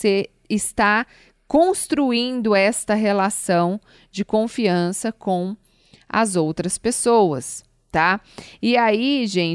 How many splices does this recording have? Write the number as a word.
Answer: zero